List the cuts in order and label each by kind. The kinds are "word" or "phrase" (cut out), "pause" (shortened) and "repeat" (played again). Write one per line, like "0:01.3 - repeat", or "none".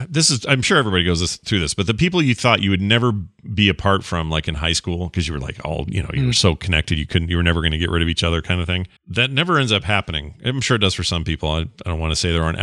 0:09.0 - pause